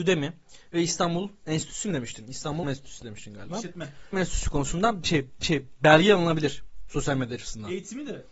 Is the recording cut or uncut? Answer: cut